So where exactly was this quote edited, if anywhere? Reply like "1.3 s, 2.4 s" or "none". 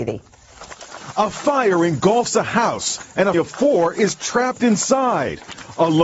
3.3 s